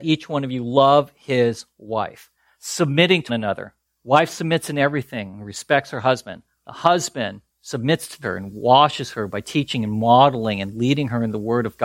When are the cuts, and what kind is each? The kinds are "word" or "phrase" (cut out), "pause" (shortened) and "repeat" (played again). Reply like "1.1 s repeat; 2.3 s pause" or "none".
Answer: 2.4 s pause; 3.3 s word; 3.9 s pause; 7.5 s pause; 8.2 s phrase